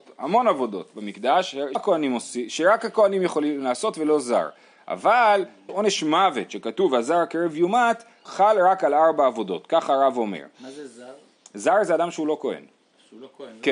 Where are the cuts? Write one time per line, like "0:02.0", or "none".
0:01.7
0:05.7
0:08.3